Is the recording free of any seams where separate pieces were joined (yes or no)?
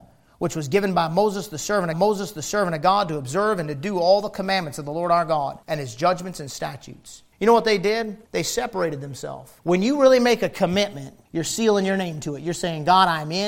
no